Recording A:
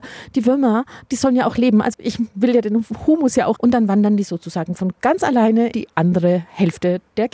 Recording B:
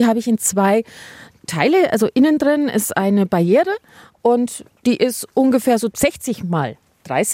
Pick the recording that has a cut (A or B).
A